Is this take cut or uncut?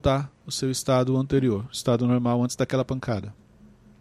uncut